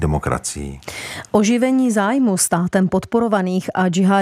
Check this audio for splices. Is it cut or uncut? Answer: uncut